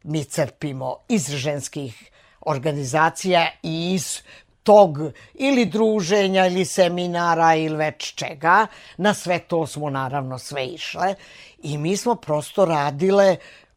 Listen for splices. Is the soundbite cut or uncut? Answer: uncut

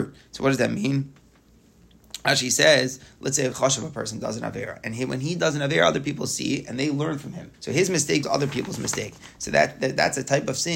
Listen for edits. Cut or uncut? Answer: cut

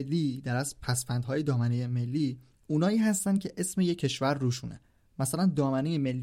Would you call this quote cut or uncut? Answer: uncut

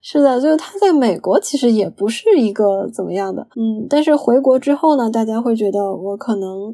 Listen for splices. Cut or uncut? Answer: cut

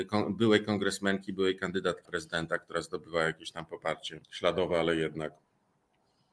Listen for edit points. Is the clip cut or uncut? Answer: cut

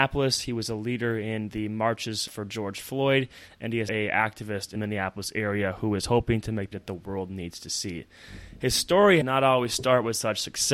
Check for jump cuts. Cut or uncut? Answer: cut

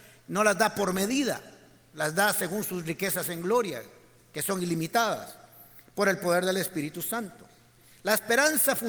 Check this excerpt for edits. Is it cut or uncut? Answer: uncut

